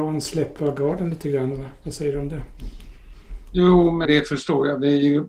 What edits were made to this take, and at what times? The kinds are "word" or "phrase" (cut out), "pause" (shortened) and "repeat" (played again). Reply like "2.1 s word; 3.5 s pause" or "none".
4.0 s word